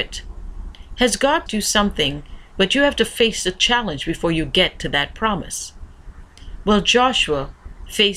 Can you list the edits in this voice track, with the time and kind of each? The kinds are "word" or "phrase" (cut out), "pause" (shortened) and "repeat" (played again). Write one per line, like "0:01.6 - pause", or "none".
0:01.5 - word